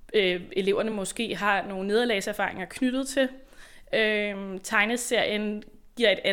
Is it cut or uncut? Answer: uncut